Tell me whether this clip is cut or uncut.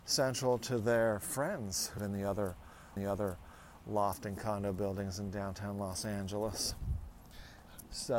cut